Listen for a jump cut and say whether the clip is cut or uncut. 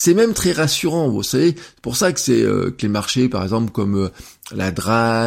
uncut